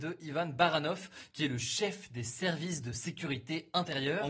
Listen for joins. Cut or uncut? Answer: uncut